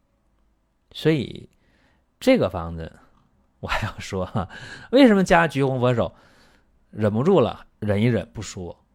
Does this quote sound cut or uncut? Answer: uncut